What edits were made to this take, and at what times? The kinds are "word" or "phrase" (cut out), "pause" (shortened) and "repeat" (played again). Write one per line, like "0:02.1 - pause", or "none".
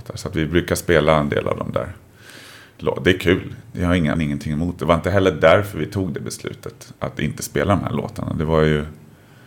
0:04.1 - word